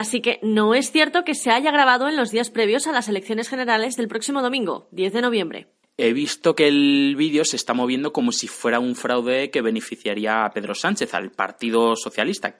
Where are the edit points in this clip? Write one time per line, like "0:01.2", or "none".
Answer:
none